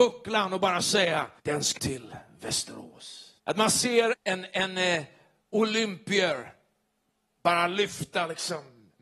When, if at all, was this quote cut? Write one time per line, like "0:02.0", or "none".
0:01.4
0:01.8
0:03.4
0:04.1